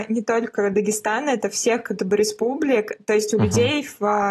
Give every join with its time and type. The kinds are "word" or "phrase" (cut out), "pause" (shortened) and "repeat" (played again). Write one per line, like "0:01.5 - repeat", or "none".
0:02.0 - word